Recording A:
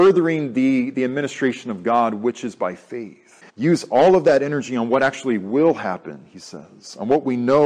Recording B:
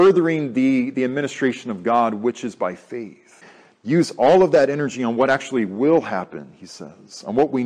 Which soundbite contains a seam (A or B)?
A